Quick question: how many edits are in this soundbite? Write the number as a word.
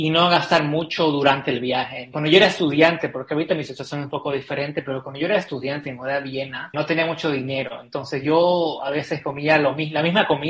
zero